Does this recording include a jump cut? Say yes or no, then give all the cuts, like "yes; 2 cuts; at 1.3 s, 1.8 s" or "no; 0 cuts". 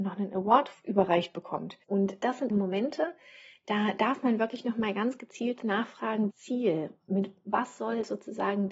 yes; 3 cuts; at 1.8 s, 2.5 s, 6.3 s